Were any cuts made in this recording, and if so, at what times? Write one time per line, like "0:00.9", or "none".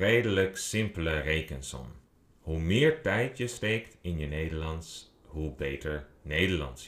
none